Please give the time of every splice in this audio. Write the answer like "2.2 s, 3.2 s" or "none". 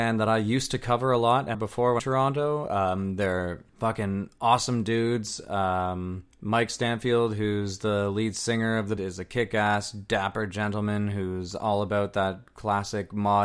1.5 s, 2.0 s, 3.7 s, 6.3 s, 9.0 s